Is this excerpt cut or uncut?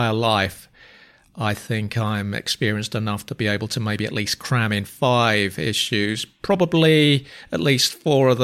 uncut